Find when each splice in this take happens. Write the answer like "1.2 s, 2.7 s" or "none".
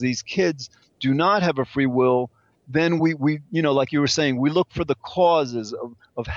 none